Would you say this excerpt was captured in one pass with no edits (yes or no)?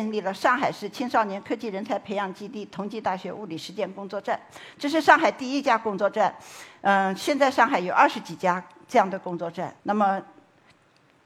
no